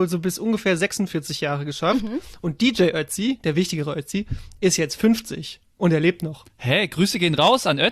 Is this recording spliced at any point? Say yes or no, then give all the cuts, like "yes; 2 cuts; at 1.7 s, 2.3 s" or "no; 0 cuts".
no; 0 cuts